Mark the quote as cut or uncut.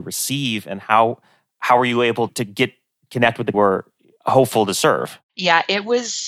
cut